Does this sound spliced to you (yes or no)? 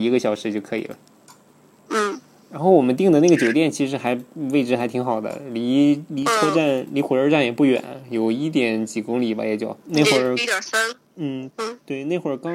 yes